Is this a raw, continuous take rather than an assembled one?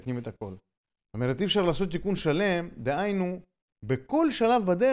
yes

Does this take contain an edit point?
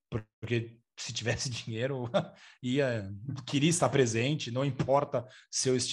no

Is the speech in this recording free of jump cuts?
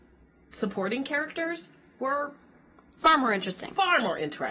yes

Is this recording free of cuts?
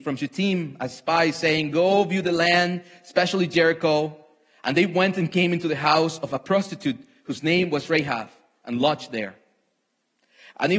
yes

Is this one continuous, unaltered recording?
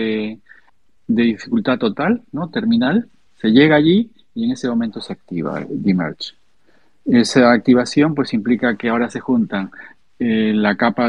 yes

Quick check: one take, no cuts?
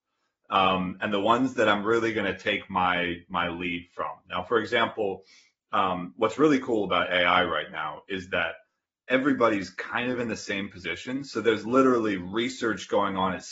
yes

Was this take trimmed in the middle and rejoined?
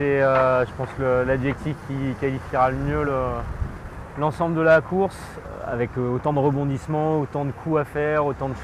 no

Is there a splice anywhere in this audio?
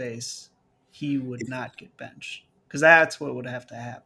no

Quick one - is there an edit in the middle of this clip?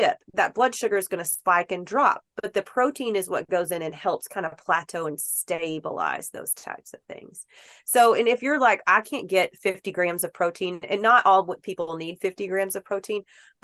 no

